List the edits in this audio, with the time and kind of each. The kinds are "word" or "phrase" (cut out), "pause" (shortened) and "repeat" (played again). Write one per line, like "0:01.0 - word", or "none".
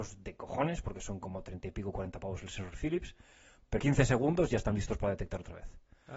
0:03.8 - word